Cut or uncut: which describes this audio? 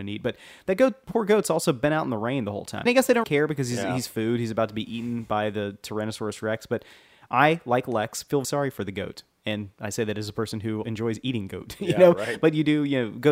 cut